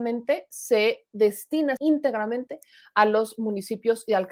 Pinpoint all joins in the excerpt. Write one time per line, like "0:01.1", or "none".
0:01.8